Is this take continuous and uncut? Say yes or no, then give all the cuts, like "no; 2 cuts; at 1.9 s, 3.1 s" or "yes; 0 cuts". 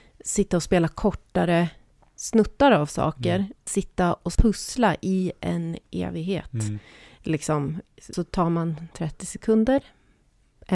no; 3 cuts; at 3.7 s, 4.3 s, 8.1 s